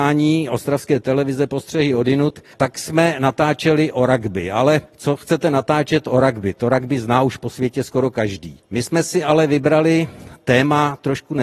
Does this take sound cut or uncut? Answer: cut